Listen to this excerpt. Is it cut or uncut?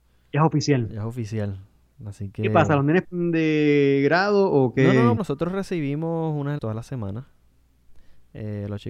cut